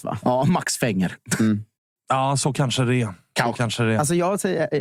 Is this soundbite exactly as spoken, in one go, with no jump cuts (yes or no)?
yes